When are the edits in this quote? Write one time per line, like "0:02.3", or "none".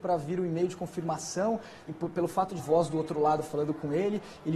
0:01.9
0:02.6